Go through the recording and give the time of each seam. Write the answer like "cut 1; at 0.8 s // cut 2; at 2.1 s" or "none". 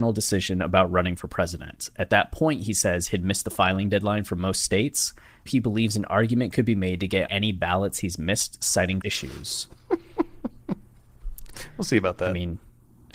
cut 1; at 5.5 s // cut 2; at 7.3 s // cut 3; at 9.0 s